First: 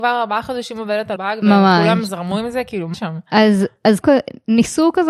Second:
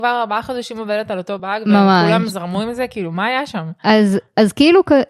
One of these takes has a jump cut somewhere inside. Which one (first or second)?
first